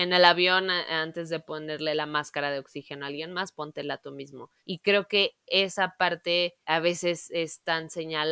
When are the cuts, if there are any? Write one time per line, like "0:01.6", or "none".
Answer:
0:04.6
0:06.6